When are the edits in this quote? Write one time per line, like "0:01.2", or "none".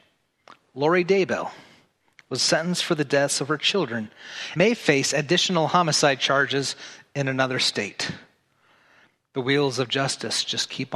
0:04.6